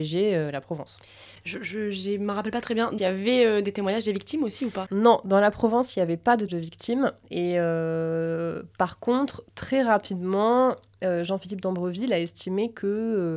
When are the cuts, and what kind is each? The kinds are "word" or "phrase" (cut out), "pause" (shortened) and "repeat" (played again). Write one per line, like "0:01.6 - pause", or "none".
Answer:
0:03.0 - phrase
0:04.9 - word
0:06.5 - word